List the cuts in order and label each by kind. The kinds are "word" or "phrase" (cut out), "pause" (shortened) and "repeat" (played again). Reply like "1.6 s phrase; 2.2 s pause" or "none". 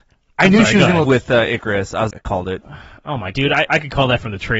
1.0 s word; 2.1 s word; 3.3 s word; 3.7 s word